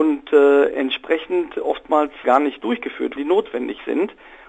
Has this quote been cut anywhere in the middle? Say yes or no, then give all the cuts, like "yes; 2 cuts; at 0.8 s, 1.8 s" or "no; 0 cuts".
yes; 2 cuts; at 2.2 s, 3.2 s